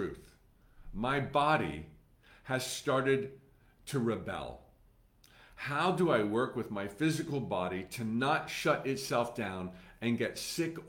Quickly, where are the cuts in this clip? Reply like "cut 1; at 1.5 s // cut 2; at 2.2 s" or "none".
none